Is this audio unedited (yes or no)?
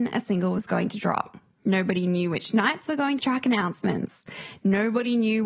no